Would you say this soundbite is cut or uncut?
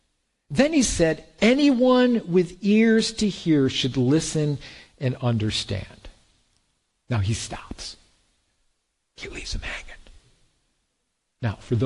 uncut